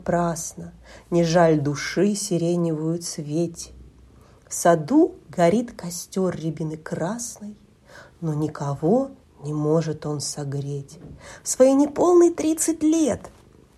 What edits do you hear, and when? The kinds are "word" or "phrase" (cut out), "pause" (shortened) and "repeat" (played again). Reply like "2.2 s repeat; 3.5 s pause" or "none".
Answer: none